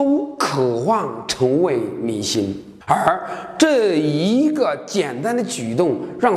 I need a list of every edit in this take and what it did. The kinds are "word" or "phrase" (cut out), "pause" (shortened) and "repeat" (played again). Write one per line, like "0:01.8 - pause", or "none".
0:02.8 - pause

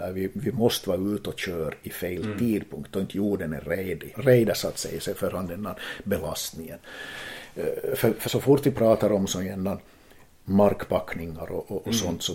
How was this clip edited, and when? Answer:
0:04.1 - word
0:08.2 - word

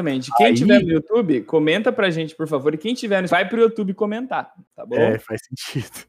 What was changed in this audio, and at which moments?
0:03.3 - word

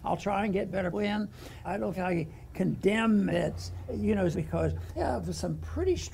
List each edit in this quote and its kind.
0:00.9 - word
0:01.6 - word
0:02.0 - word
0:03.3 - word
0:03.9 - word
0:04.3 - word
0:05.0 - word

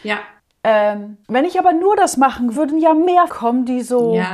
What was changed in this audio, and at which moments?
0:01.2 - pause
0:02.6 - word
0:03.3 - phrase

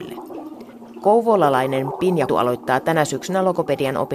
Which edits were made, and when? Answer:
0:02.3 - word

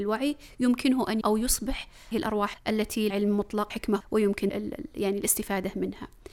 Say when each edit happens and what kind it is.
0:01.2 - word
0:02.1 - word
0:02.5 - word
0:03.1 - word
0:03.7 - word
0:04.0 - word
0:04.5 - word

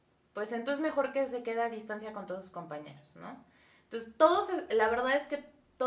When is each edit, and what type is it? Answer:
none

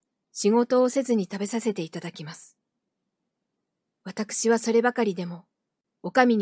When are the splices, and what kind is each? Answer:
none

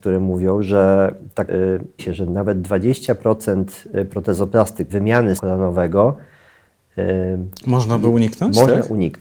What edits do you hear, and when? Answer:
0:01.5 - word
0:02.0 - word
0:04.9 - word
0:05.4 - word

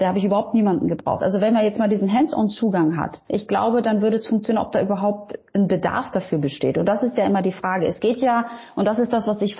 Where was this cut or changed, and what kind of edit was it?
0:03.2 - pause

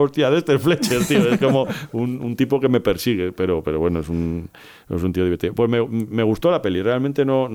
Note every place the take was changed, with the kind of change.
none

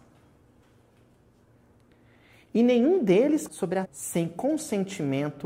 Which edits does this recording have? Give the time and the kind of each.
0:03.5 - word
0:03.9 - word

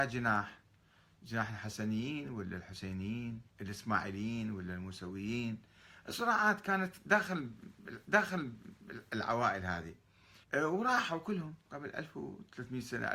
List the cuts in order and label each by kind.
0:03.5 - pause
0:08.0 - repeat
0:10.4 - pause

